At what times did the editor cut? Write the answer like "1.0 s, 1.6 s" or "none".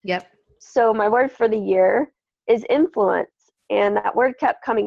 none